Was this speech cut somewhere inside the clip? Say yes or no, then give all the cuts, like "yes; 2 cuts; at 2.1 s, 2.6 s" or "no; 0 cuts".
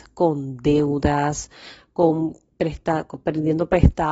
no; 0 cuts